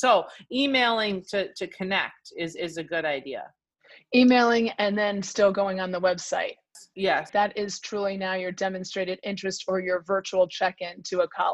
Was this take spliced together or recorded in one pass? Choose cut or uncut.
uncut